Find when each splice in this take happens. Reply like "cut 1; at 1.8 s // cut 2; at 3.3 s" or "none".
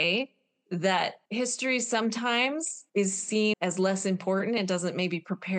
cut 1; at 1.3 s // cut 2; at 2.9 s // cut 3; at 3.5 s